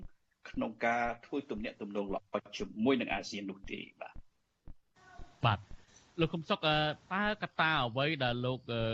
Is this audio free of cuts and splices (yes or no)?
yes